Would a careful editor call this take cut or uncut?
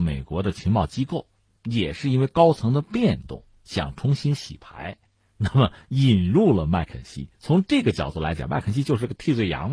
uncut